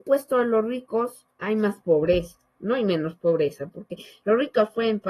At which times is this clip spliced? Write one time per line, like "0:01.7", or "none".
none